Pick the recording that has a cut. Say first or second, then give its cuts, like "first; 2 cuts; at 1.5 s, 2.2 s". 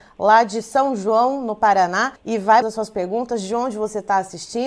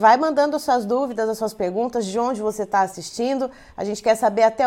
first; 2 cuts; at 2.2 s, 2.6 s